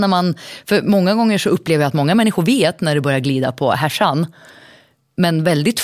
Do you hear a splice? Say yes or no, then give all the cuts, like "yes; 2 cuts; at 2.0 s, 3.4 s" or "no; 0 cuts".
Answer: no; 0 cuts